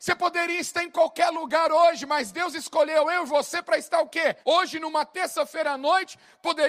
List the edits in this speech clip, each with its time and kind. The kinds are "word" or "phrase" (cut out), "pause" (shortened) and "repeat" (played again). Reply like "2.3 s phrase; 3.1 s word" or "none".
4.4 s pause